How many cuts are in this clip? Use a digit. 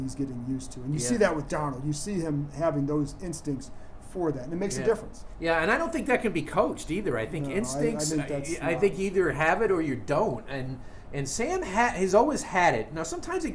0